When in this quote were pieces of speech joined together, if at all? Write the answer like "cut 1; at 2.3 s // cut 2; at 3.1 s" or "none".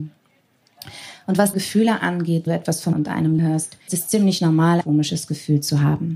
cut 1; at 1.5 s // cut 2; at 2.5 s // cut 3; at 2.9 s // cut 4; at 3.4 s // cut 5; at 3.9 s // cut 6; at 4.8 s